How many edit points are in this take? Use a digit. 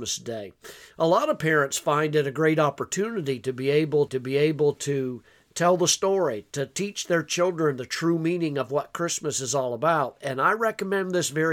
1